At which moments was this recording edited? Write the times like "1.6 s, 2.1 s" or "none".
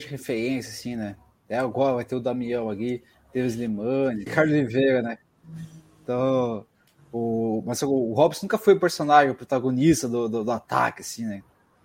4.3 s